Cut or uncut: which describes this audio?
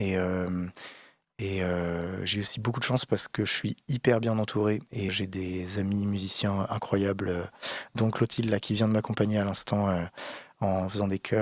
cut